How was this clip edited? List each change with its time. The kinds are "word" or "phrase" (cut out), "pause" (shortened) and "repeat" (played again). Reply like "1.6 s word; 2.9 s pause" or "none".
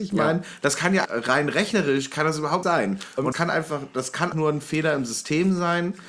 1.0 s word; 2.6 s word; 3.3 s word; 4.3 s word